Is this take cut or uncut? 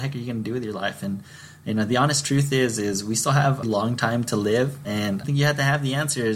cut